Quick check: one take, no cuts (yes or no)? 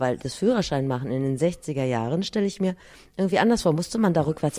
yes